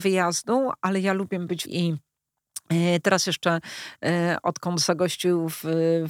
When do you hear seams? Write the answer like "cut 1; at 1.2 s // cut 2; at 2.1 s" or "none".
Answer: cut 1; at 1.6 s